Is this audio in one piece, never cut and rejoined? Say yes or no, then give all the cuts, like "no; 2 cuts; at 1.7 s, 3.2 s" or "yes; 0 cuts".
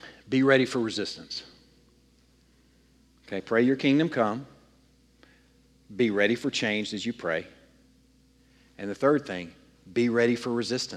yes; 0 cuts